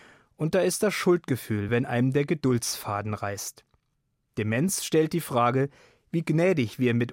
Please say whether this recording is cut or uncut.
uncut